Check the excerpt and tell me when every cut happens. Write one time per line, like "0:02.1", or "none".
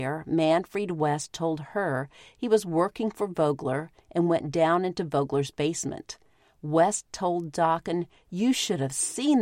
none